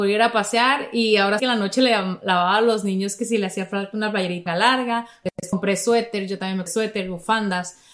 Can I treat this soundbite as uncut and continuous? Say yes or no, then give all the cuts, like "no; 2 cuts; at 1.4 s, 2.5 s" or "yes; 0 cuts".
no; 3 cuts; at 1.4 s, 4.5 s, 6.7 s